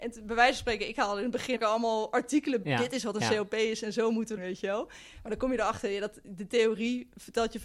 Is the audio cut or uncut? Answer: cut